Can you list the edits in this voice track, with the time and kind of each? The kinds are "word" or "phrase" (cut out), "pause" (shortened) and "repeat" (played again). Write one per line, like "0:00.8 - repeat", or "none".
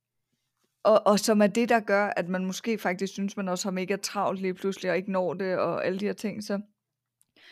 none